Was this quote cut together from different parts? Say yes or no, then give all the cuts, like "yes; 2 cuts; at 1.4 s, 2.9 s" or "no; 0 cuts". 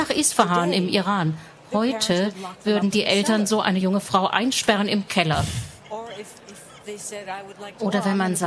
no; 0 cuts